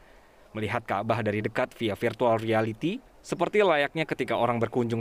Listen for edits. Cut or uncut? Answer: uncut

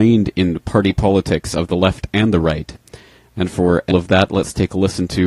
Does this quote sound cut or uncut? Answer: cut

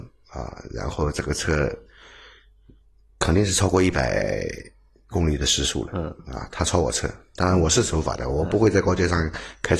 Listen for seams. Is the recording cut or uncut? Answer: uncut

